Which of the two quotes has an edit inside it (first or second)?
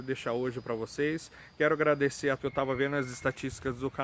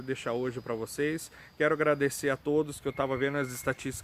first